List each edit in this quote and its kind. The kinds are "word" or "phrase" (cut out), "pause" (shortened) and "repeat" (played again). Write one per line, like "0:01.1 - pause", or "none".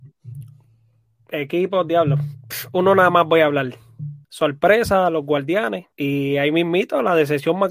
0:04.2 - pause
0:05.9 - pause